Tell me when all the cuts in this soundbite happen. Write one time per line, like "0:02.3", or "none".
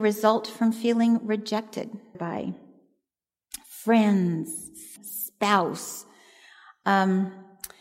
0:02.1
0:05.0